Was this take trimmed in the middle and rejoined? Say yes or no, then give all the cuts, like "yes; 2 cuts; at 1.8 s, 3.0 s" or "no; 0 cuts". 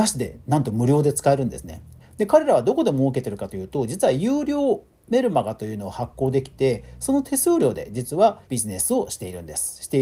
yes; 2 cuts; at 2.0 s, 8.4 s